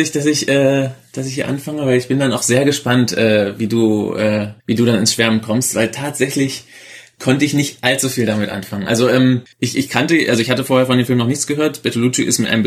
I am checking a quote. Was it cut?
yes; 2 cuts; at 4.6 s, 9.5 s

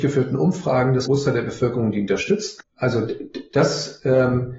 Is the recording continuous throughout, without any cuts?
no; 1 cut; at 1.1 s

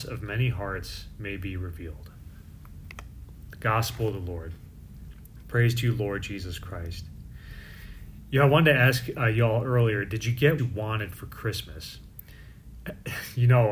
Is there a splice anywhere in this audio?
yes; 1 cut; at 10.6 s

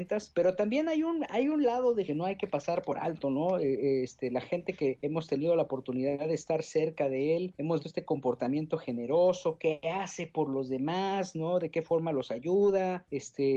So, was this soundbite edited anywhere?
yes; 2 cuts; at 2.1 s, 7.8 s

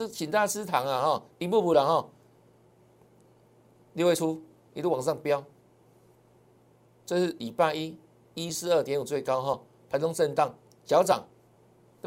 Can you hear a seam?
no; 0 cuts

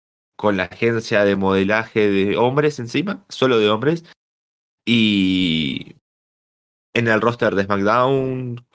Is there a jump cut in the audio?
no; 0 cuts

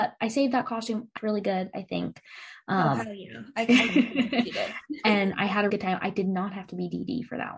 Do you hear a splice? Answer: yes; 2 cuts; at 1.2 s, 5.7 s

